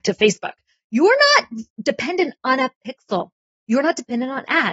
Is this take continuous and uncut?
yes; 0 cuts

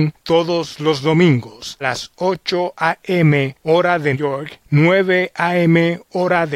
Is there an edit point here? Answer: yes; 2 cuts; at 1.8 s, 4.1 s

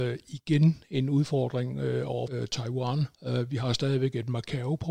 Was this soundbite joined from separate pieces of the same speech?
yes; 2 cuts; at 2.3 s, 3.1 s

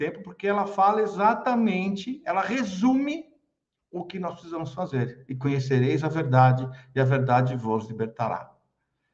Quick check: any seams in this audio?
yes; 1 cut; at 3.6 s

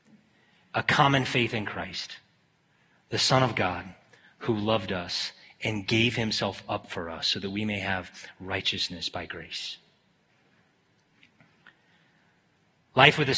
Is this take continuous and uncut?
yes; 0 cuts

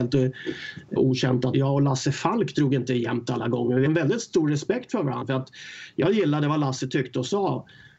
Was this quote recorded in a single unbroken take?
no; 3 cuts; at 1.0 s, 1.5 s, 3.9 s

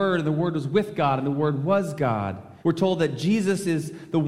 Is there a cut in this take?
yes; 1 cut; at 2.6 s

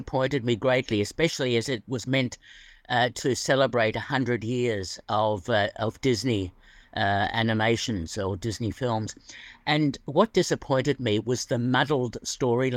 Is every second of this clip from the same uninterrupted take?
yes; 0 cuts

